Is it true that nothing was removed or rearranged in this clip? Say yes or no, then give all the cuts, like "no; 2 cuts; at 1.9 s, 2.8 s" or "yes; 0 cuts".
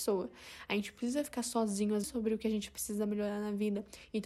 no; 1 cut; at 2.0 s